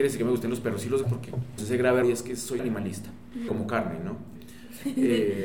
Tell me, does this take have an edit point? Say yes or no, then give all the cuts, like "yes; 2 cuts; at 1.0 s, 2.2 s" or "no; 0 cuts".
yes; 5 cuts; at 1.0 s, 1.6 s, 2.0 s, 2.6 s, 3.5 s